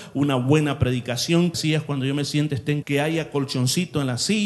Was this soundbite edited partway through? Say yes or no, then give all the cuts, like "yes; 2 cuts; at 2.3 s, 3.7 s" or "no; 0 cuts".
yes; 2 cuts; at 1.5 s, 2.8 s